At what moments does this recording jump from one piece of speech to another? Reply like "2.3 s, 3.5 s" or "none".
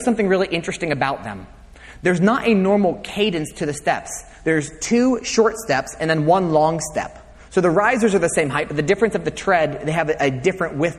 none